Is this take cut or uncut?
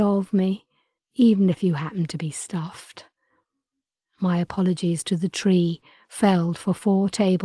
uncut